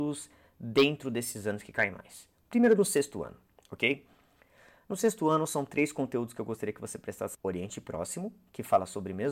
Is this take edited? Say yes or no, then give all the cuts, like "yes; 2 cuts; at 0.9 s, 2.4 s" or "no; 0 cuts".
yes; 1 cut; at 7.3 s